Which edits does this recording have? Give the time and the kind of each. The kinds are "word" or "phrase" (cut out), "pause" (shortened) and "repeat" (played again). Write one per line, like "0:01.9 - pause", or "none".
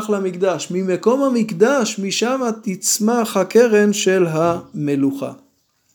none